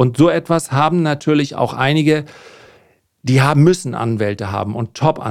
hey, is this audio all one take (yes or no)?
yes